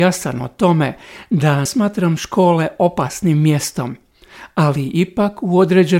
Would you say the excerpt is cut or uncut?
cut